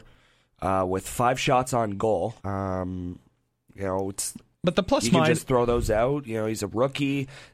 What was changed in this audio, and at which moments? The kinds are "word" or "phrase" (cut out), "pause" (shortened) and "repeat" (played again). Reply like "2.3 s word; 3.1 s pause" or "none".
2.4 s pause; 4.5 s pause